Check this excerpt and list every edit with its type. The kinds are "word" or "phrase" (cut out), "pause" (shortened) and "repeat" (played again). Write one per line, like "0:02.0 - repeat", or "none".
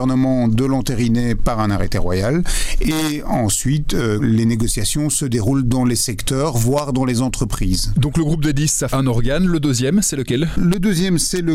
0:08.9 - word